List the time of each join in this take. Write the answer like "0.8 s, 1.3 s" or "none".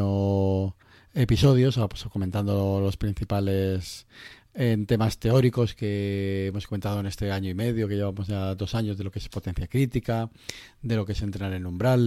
none